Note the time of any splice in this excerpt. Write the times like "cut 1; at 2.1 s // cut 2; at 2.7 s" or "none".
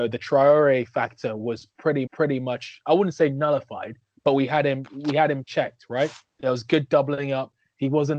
cut 1; at 2.1 s // cut 2; at 4.9 s // cut 3; at 6.3 s